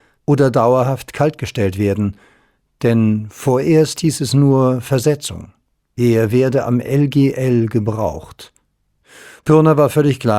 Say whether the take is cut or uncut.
uncut